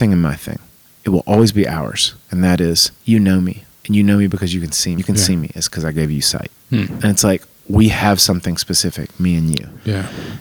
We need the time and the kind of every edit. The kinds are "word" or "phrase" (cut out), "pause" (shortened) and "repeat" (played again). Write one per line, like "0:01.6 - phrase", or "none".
0:03.0 - pause
0:03.7 - pause
0:05.0 - phrase
0:06.6 - pause